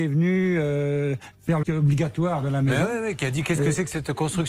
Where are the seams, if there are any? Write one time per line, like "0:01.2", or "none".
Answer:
0:01.6